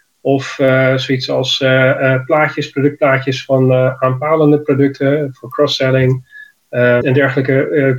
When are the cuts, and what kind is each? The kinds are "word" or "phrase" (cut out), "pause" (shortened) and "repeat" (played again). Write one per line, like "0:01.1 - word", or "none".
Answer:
0:07.0 - word